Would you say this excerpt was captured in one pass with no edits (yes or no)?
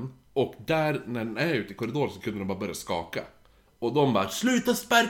no